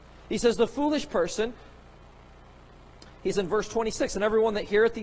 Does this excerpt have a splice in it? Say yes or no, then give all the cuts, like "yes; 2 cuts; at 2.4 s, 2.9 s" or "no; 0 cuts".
yes; 1 cut; at 3.3 s